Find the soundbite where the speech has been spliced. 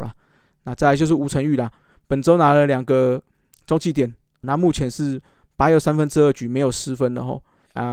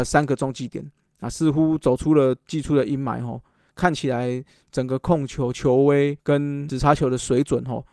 first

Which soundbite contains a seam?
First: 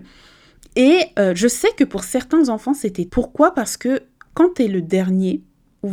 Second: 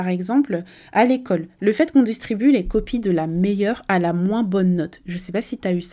first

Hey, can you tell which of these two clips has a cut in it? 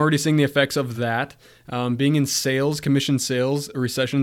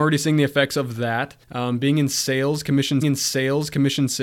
second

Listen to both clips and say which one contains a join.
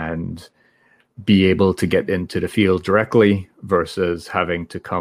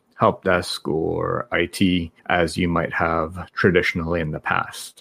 second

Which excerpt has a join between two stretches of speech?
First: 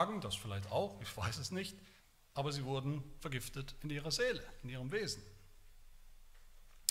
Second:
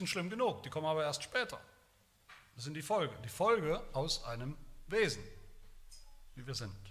first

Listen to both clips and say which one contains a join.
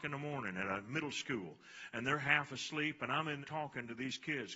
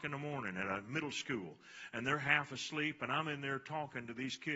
first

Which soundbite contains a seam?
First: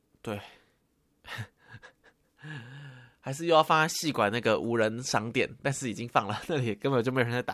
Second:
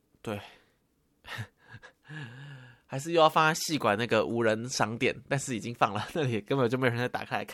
second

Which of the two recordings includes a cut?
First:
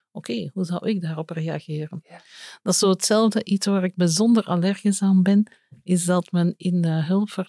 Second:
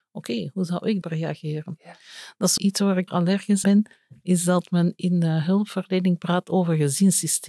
second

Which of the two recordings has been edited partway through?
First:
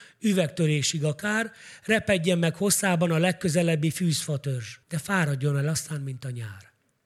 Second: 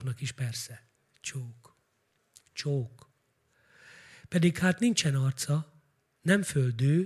first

